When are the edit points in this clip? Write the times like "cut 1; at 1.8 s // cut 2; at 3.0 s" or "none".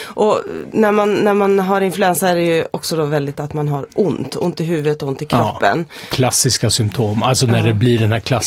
cut 1; at 3.3 s